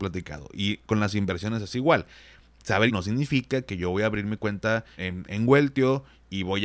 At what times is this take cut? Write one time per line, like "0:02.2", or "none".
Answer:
0:02.9
0:05.0